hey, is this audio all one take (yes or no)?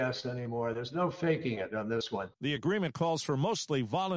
yes